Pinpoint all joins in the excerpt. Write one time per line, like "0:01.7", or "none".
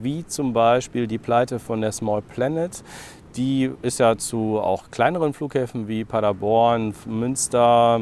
none